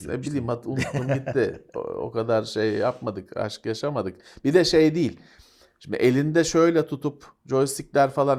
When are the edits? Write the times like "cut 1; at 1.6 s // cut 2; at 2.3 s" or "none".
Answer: none